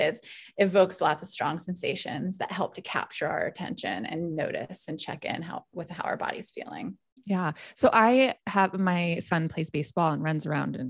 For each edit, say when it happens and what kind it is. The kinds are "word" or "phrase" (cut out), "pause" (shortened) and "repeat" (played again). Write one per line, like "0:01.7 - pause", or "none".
0:07.2 - pause